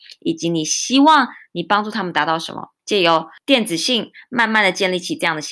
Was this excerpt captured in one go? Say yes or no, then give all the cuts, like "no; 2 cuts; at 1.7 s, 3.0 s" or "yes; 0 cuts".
no; 1 cut; at 2.8 s